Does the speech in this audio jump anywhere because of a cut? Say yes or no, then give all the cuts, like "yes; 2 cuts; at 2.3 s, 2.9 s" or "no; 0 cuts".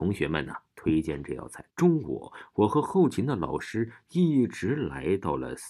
yes; 1 cut; at 1.7 s